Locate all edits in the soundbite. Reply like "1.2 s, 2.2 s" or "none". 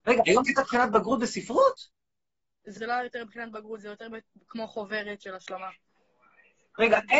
2.8 s